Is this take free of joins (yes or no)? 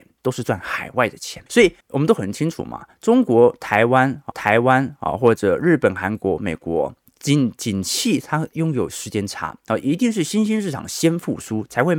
no